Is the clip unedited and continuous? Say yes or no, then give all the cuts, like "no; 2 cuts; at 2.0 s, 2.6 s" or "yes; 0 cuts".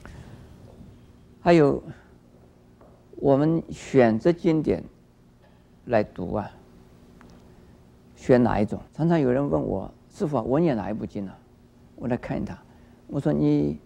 no; 1 cut; at 8.9 s